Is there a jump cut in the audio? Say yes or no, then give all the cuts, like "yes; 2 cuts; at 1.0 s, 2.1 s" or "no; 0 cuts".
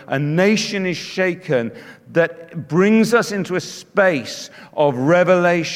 no; 0 cuts